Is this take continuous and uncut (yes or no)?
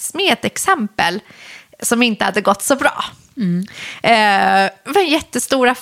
yes